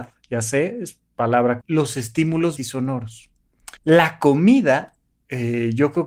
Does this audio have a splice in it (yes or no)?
yes